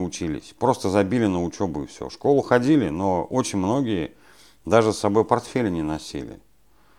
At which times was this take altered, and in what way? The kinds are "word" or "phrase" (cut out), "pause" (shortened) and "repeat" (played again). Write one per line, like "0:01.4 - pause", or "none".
none